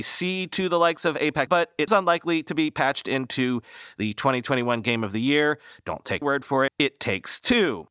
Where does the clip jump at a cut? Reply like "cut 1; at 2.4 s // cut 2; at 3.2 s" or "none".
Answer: cut 1; at 1.5 s // cut 2; at 1.9 s // cut 3; at 6.2 s // cut 4; at 6.7 s